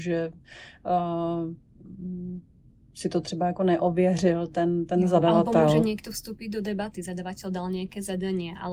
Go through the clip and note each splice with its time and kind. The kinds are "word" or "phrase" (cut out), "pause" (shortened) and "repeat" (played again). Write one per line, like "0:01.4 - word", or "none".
none

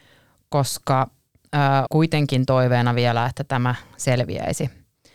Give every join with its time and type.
0:01.9 - word

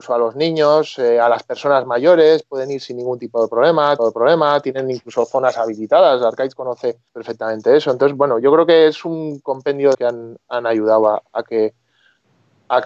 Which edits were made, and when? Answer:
0:04.0 - repeat
0:07.1 - pause
0:09.9 - phrase

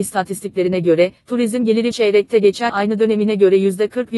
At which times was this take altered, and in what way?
0:01.9 - word
0:02.7 - word

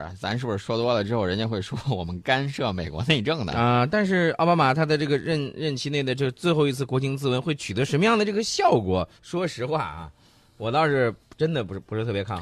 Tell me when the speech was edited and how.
0:09.2 - pause

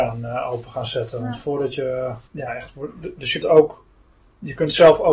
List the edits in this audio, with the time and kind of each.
0:02.3 - pause
0:03.4 - word

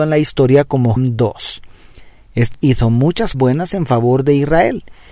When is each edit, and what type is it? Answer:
0:01.0 - word
0:02.5 - word
0:03.3 - word

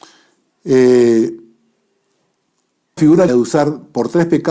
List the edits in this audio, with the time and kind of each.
0:03.0 - word
0:03.3 - word

